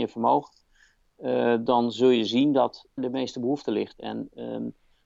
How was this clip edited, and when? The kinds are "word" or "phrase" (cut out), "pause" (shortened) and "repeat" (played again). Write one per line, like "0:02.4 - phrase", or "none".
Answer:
0:03.0 - word